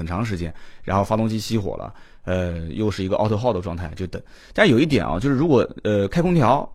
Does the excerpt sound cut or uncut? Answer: uncut